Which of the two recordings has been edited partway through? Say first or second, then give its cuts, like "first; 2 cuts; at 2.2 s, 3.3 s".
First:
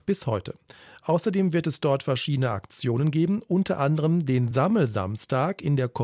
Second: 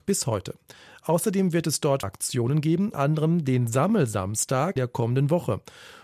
second; 3 cuts; at 2.0 s, 2.9 s, 4.8 s